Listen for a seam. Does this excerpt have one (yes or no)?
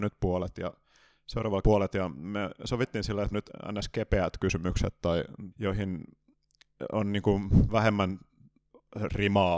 yes